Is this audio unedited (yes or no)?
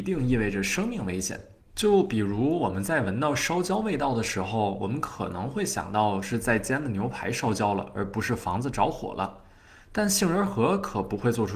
no